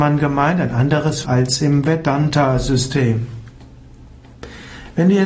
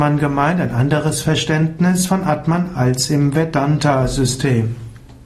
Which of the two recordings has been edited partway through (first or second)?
first